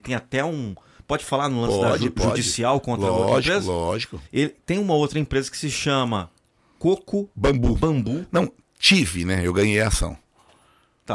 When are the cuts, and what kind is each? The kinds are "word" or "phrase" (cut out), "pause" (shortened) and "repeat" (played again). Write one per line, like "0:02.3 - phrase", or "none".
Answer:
0:04.3 - pause